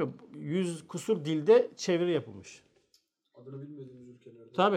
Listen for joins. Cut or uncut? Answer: uncut